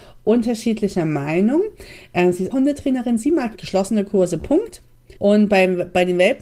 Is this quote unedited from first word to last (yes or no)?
no